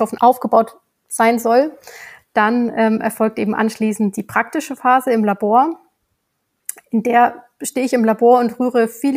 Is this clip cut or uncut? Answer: uncut